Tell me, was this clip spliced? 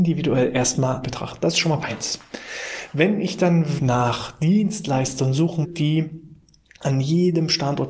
yes; 4 cuts; at 1.0 s, 1.8 s, 3.8 s, 5.6 s

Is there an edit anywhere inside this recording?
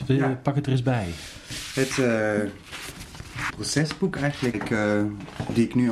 yes; 3 cuts; at 1.9 s, 3.5 s, 4.5 s

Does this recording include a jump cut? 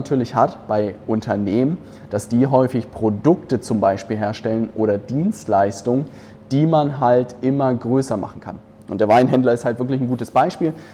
no; 0 cuts

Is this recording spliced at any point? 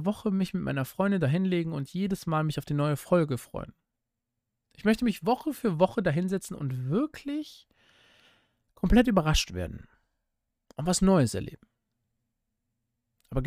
no; 0 cuts

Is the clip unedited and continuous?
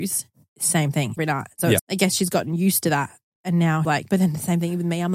no; 3 cuts; at 1.2 s, 1.8 s, 3.8 s

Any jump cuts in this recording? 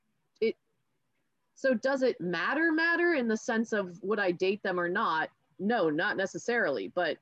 no; 0 cuts

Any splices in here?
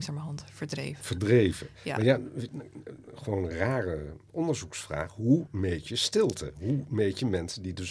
no; 0 cuts

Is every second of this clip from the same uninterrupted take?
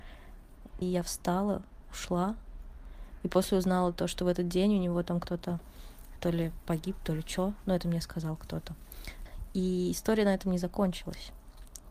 yes; 0 cuts

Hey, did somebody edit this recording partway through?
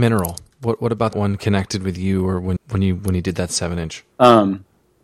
yes; 3 cuts; at 1.1 s, 2.6 s, 4.1 s

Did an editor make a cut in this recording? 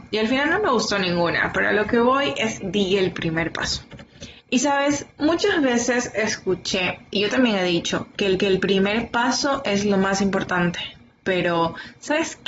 yes; 4 cuts; at 2.6 s, 4.4 s, 5.1 s, 8.4 s

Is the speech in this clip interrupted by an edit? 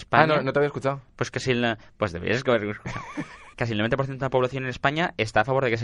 yes; 1 cut; at 3.5 s

